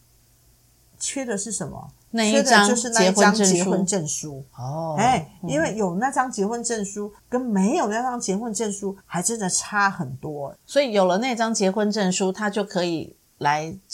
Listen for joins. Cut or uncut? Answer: cut